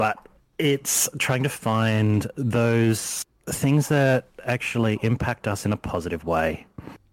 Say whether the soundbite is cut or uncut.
uncut